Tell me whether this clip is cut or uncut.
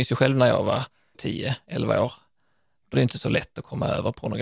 cut